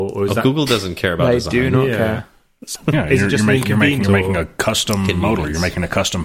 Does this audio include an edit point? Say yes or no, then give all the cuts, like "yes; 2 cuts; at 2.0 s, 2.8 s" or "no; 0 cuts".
yes; 2 cuts; at 2.8 s, 4.0 s